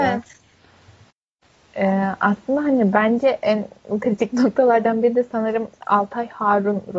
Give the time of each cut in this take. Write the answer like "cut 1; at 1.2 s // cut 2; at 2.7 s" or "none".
none